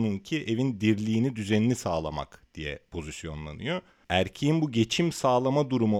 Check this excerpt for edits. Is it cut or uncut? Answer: uncut